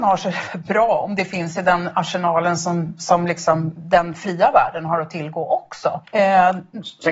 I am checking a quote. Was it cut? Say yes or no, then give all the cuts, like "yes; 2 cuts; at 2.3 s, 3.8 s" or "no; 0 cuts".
yes; 1 cut; at 6.0 s